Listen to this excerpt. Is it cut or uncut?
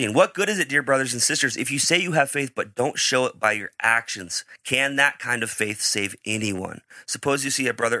uncut